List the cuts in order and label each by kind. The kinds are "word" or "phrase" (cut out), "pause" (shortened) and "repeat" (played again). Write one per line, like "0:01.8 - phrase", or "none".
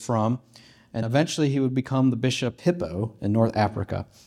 0:01.0 - word
0:02.6 - word